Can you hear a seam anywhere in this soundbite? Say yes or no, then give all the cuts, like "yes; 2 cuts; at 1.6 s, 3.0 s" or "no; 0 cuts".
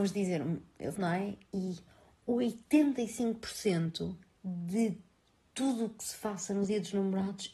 yes; 2 cuts; at 0.9 s, 4.3 s